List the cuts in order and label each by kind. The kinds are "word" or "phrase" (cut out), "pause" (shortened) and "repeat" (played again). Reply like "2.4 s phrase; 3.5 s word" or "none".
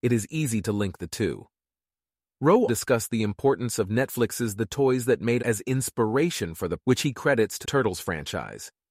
2.7 s word; 5.4 s word; 6.8 s word; 7.6 s word